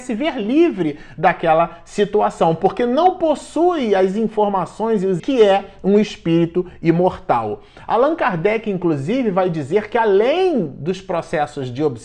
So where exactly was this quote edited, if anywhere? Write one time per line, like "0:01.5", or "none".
0:05.2